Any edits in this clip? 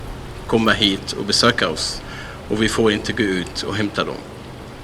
no; 0 cuts

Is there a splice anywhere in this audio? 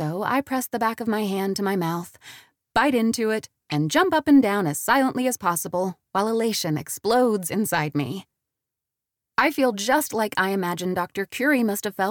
no; 0 cuts

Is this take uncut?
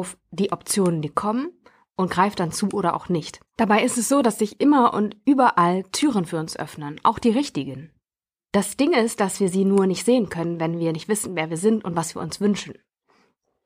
no; 1 cut; at 3.5 s

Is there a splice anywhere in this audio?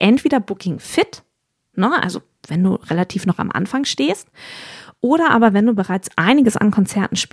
no; 0 cuts

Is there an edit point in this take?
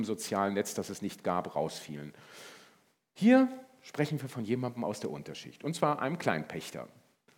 no; 0 cuts

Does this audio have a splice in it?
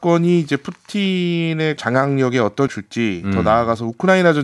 yes; 2 cuts; at 1.8 s, 2.7 s

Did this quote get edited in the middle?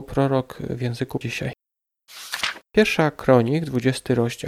yes; 2 cuts; at 1.2 s, 2.6 s

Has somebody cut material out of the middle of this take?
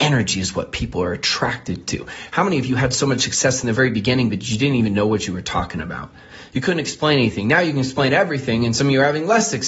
no; 0 cuts

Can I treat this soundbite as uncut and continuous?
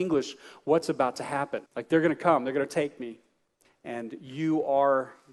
no; 2 cuts; at 1.7 s, 3.6 s

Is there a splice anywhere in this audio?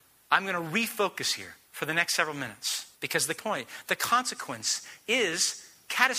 yes; 3 cuts; at 1.6 s, 2.9 s, 3.4 s

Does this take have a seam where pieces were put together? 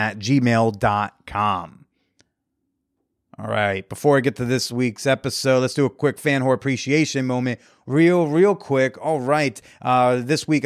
no; 0 cuts

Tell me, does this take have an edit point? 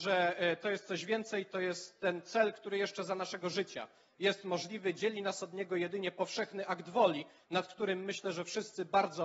no; 0 cuts

